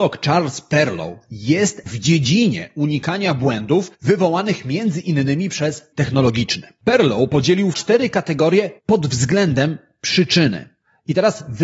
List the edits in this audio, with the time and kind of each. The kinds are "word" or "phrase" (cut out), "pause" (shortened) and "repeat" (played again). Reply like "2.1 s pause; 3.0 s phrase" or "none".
1.9 s word; 3.9 s pause; 5.9 s word; 7.7 s phrase; 8.8 s pause